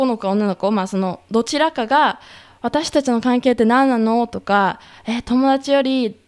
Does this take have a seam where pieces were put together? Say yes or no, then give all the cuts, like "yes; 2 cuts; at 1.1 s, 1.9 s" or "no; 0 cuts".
no; 0 cuts